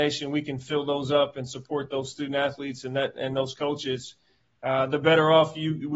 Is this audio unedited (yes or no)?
yes